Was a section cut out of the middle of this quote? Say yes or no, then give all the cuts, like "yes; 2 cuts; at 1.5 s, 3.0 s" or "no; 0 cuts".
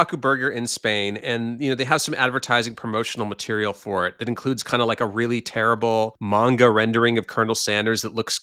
no; 0 cuts